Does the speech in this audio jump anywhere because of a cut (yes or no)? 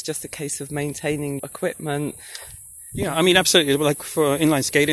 yes